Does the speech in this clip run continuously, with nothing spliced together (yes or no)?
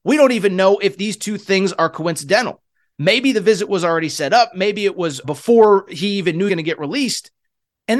no